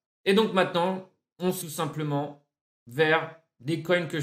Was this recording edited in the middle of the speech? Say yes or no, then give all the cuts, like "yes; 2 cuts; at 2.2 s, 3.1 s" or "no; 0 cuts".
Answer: yes; 1 cut; at 1.6 s